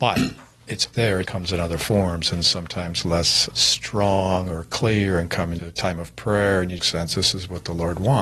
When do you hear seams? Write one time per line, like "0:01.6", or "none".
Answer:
0:00.9
0:01.2
0:03.5
0:05.6
0:06.8